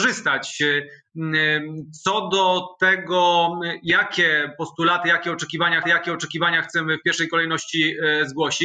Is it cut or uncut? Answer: cut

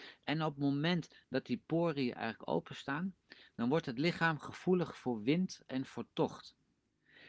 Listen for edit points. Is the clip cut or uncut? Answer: uncut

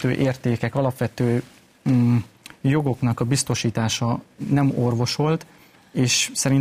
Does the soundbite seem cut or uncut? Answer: uncut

